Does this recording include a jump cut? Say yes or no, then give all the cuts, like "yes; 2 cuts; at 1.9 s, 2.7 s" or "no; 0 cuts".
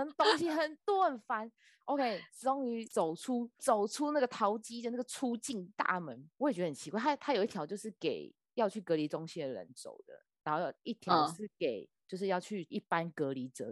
no; 0 cuts